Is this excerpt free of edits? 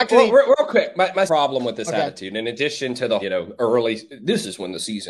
no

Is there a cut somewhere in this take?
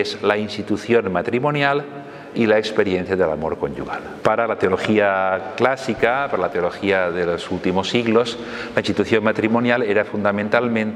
no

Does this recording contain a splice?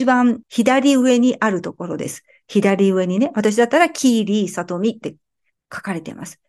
no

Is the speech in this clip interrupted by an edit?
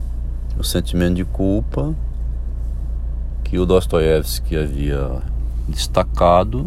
no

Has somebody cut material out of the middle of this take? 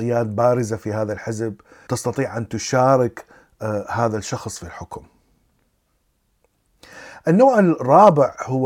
no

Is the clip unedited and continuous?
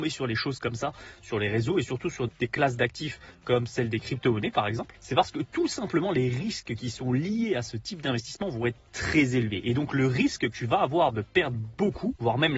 no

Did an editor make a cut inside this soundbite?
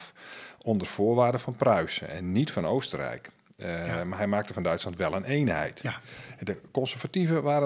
no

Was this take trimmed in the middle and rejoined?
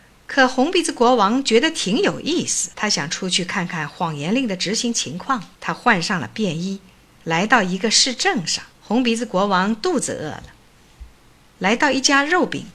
yes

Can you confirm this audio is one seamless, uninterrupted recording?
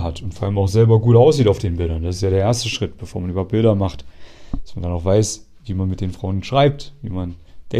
yes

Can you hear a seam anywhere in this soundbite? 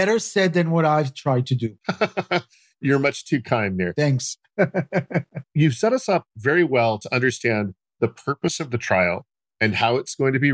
no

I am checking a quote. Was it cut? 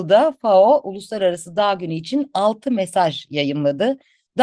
no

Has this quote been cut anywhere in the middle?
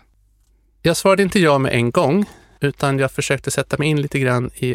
no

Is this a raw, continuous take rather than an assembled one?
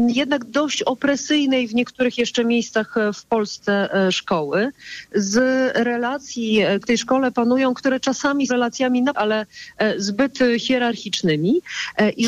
no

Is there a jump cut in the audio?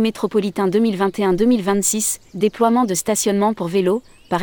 no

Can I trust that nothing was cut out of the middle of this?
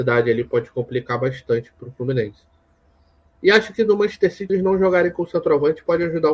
no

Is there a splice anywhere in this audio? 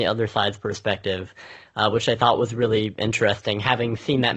no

